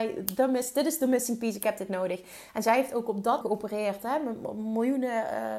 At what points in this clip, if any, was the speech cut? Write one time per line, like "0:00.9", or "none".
0:03.4